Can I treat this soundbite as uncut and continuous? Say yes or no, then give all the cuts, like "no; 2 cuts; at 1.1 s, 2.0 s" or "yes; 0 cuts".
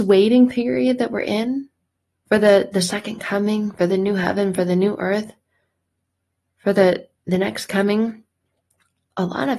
no; 1 cut; at 1.8 s